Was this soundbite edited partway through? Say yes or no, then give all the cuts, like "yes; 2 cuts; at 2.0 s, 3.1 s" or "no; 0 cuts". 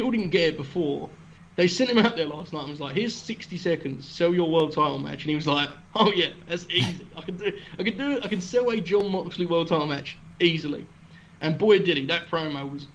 no; 0 cuts